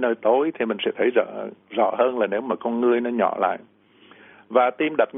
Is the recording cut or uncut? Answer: uncut